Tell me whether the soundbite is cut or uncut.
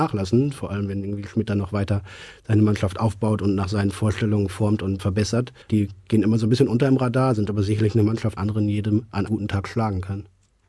cut